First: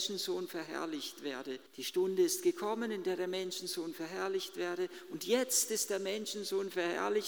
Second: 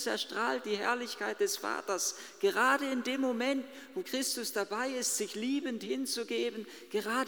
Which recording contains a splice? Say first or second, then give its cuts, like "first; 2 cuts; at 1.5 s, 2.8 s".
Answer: first; 1 cut; at 1.7 s